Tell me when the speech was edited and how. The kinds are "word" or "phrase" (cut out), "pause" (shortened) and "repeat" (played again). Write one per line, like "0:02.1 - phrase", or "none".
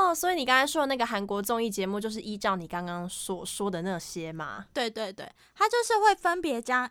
none